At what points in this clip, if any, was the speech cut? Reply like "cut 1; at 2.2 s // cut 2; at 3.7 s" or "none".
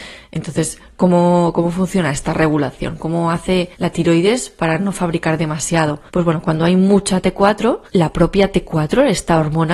cut 1; at 3.7 s // cut 2; at 6.1 s // cut 3; at 7.9 s